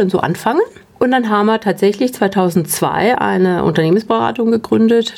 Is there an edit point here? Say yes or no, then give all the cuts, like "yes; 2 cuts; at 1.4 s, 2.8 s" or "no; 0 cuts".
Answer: no; 0 cuts